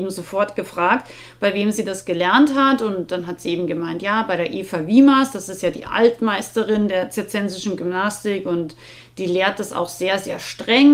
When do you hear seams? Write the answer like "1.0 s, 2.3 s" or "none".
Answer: none